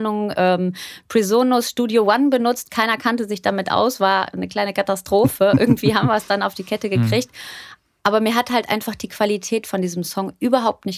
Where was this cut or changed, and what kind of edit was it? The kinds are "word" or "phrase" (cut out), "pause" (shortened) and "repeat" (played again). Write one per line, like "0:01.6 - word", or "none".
none